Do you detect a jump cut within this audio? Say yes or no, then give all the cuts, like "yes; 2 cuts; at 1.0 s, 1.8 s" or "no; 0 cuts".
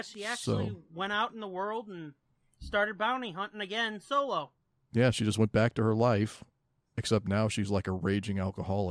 no; 0 cuts